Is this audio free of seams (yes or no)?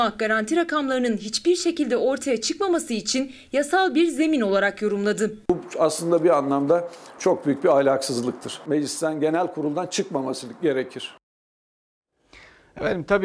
yes